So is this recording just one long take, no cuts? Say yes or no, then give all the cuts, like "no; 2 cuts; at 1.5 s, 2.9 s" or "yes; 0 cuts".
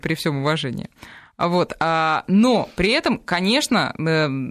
yes; 0 cuts